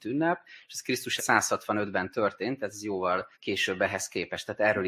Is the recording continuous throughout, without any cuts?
no; 2 cuts; at 1.2 s, 3.3 s

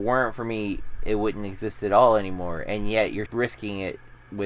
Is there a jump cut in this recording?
yes; 1 cut; at 3.3 s

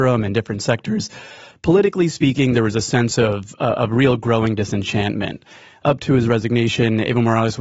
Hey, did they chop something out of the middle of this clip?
no; 0 cuts

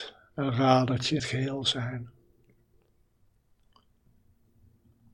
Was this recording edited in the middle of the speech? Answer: yes; 1 cut; at 1.2 s

